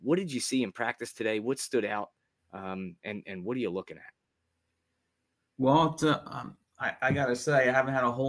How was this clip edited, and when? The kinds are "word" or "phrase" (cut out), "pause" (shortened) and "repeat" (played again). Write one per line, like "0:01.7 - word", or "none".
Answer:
none